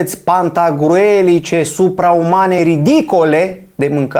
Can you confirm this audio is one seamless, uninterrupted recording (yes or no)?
yes